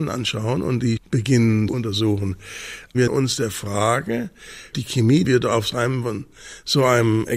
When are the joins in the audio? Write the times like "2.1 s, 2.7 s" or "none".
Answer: 1.0 s, 1.7 s, 3.1 s, 4.7 s, 5.2 s

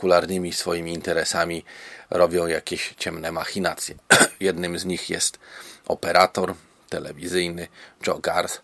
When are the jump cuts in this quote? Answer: none

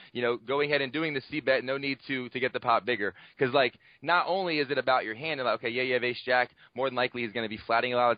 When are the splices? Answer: none

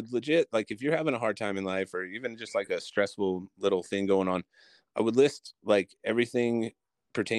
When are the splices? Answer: none

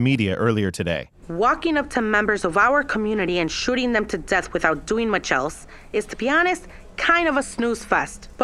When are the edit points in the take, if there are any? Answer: none

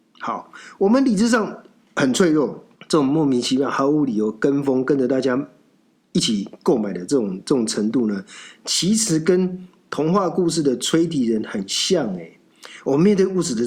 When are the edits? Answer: 2.7 s

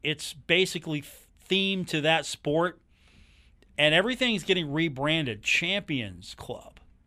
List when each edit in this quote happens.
none

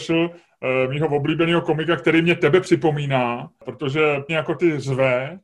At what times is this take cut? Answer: 4.3 s

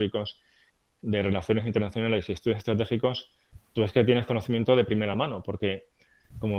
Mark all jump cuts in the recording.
none

